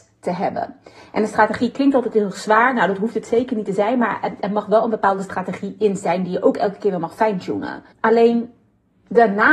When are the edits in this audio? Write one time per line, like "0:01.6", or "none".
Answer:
0:07.9